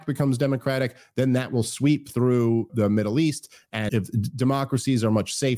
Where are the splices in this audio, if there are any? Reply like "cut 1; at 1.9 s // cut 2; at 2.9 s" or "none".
cut 1; at 2.7 s // cut 2; at 3.9 s